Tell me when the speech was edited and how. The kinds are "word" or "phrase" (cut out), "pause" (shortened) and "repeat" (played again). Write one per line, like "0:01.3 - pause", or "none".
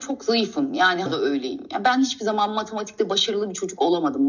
0:01.1 - word